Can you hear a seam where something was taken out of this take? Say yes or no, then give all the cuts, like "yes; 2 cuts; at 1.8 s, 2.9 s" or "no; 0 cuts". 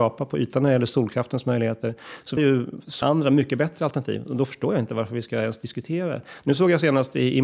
yes; 2 cuts; at 2.4 s, 3.0 s